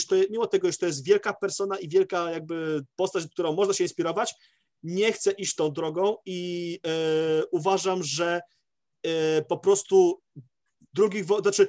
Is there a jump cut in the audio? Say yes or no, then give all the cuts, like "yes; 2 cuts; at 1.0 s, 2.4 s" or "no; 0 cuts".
no; 0 cuts